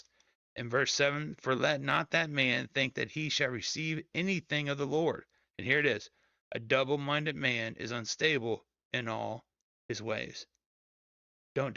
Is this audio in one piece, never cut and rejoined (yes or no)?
yes